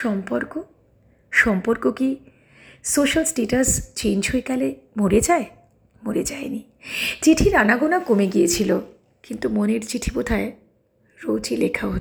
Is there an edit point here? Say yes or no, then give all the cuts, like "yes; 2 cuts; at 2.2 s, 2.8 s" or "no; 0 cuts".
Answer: no; 0 cuts